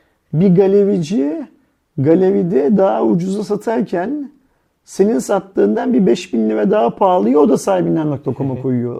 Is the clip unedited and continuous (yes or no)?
yes